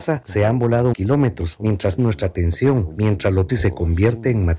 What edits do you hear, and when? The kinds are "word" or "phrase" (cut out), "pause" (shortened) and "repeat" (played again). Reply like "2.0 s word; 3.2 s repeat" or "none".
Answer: 0.9 s word; 2.0 s word; 3.5 s word